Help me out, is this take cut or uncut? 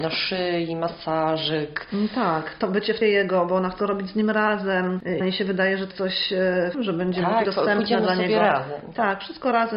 cut